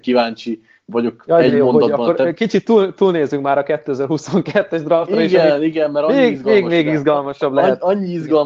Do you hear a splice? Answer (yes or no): no